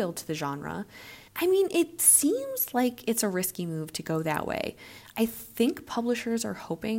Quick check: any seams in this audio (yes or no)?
yes